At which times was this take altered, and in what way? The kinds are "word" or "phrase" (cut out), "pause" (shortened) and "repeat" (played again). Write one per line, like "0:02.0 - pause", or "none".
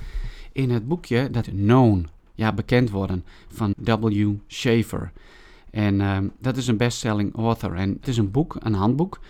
0:01.4 - word
0:03.7 - word
0:08.0 - word

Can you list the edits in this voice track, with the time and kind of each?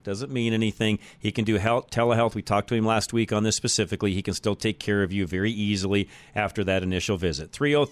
none

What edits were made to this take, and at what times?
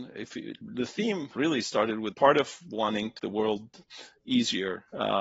0:01.4 - word
0:02.1 - word
0:03.2 - word

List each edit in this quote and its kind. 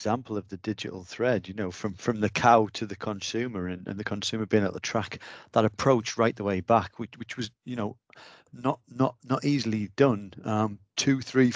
none

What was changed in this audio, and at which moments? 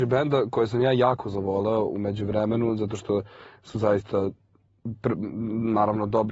none

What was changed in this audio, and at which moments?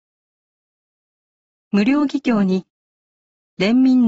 0:02.8 - pause

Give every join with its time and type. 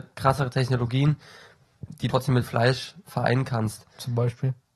0:02.1 - word

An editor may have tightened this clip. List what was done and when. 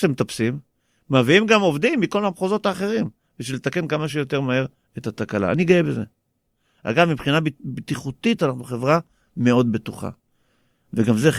none

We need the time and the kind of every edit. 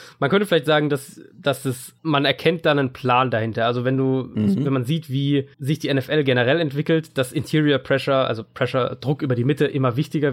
0:02.0 - pause
0:05.5 - pause

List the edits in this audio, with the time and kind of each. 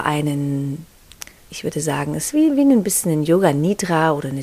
0:01.4 - pause

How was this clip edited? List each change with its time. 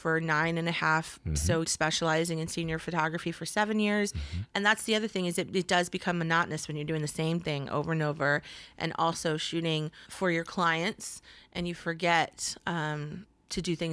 0:01.6 - phrase
0:10.1 - word

